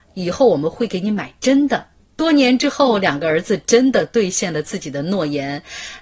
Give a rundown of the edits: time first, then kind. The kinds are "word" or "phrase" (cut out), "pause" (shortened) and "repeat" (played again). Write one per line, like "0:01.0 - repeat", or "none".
0:02.0 - pause